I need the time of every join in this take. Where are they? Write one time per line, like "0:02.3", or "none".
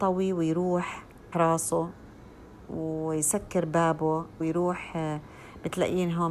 0:01.3
0:04.4